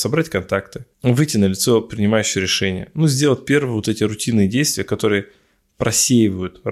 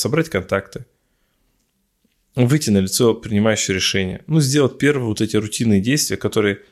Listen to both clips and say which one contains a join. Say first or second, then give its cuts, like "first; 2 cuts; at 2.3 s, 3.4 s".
first; 1 cut; at 0.9 s